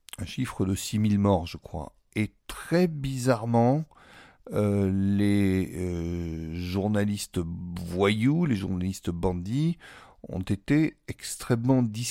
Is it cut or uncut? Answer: cut